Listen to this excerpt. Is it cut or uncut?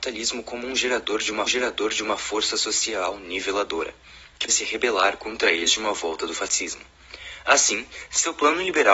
cut